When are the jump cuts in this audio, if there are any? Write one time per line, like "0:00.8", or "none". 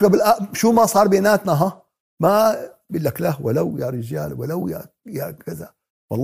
none